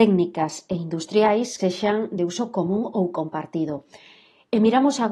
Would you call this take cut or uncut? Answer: cut